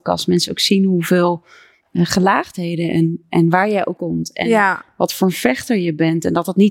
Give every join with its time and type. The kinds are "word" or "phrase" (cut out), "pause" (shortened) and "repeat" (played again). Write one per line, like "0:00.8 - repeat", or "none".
0:04.0 - word

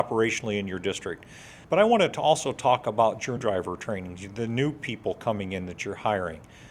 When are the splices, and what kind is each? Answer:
0:01.6 - pause
0:03.4 - word

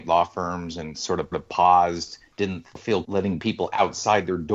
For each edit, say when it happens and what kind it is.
0:00.9 - phrase
0:01.3 - repeat
0:03.0 - word

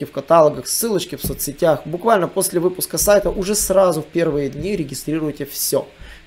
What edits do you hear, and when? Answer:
none

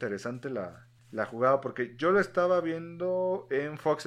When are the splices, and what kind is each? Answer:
0:01.0 - pause

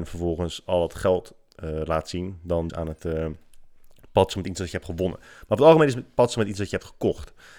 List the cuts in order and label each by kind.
0:02.7 - phrase

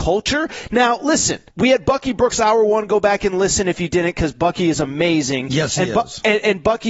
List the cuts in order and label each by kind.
0:01.5 - pause

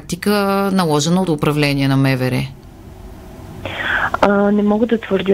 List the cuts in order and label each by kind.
0:01.3 - word

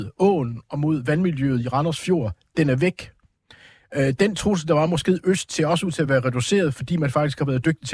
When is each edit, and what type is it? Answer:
none

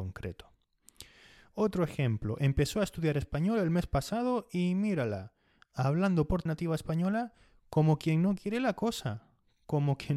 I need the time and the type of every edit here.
0:06.5 - phrase

